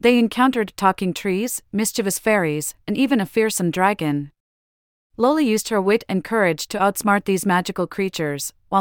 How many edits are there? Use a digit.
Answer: 0